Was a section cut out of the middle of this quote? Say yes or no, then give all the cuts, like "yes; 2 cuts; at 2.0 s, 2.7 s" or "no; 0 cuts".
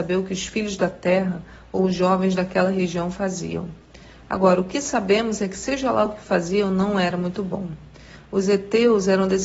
no; 0 cuts